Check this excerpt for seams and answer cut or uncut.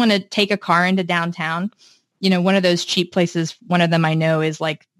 uncut